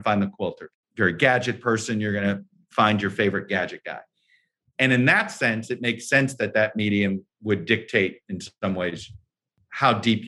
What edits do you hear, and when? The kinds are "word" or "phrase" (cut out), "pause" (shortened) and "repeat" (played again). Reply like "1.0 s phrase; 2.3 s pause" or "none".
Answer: none